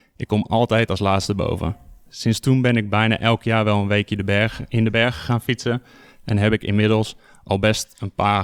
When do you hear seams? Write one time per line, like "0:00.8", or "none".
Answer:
none